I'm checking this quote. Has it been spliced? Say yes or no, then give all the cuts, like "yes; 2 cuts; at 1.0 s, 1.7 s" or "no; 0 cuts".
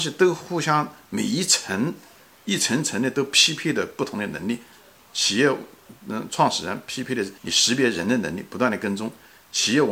yes; 1 cut; at 7.4 s